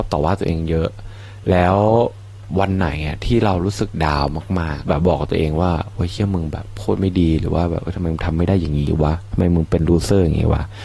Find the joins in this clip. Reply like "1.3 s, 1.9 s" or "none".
4.8 s